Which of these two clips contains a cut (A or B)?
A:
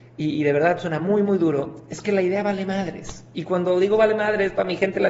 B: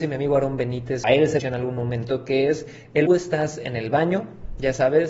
B